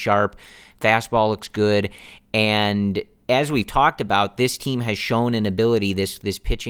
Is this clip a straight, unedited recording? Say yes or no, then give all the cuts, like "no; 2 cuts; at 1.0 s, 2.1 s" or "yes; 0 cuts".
yes; 0 cuts